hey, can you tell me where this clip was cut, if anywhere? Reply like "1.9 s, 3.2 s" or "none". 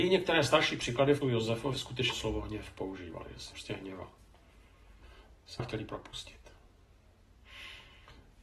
1.2 s, 1.7 s, 2.1 s, 3.5 s, 5.6 s